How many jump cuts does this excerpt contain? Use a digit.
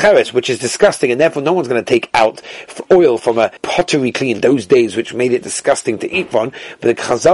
1